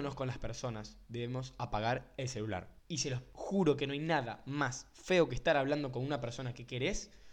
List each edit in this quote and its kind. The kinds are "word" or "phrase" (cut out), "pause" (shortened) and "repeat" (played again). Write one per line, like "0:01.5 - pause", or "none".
0:02.8 - pause

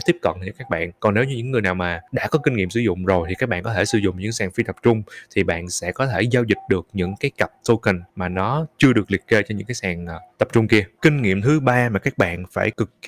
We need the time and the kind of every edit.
0:08.1 - pause

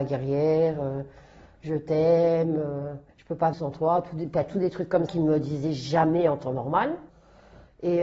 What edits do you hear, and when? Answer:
0:03.1 - pause
0:03.5 - word
0:05.1 - word

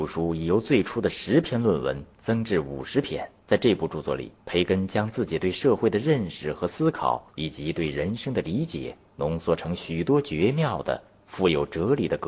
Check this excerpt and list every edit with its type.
0:03.4 - pause
0:04.4 - pause
0:07.3 - pause
0:09.1 - pause

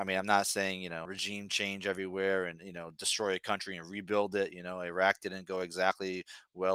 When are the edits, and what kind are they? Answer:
0:01.0 - word

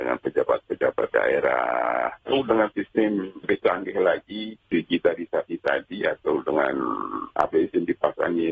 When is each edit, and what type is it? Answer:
0:01.1 - word
0:03.4 - word
0:04.6 - word
0:07.5 - phrase

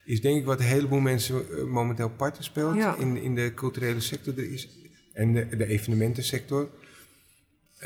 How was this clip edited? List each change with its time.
none

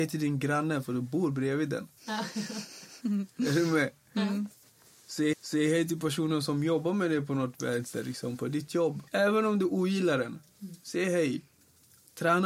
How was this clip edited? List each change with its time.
0:05.3 - repeat
0:09.1 - pause

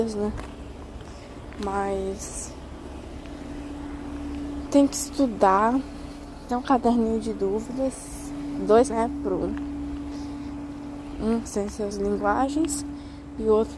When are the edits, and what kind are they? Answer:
0:04.7 - word
0:06.5 - word
0:08.9 - word
0:11.4 - word
0:11.9 - word

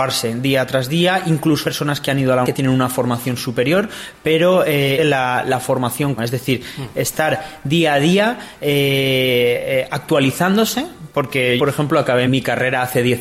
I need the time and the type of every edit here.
0:01.6 - word
0:02.4 - word
0:05.0 - phrase
0:06.2 - word
0:11.6 - word
0:12.3 - word

